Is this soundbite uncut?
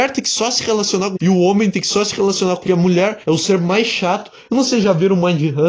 no; 4 cuts; at 1.2 s, 2.7 s, 3.2 s, 4.6 s

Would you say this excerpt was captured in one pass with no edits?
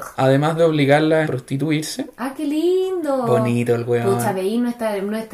no; 1 cut; at 1.3 s

